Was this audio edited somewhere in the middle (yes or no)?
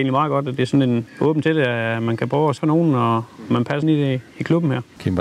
yes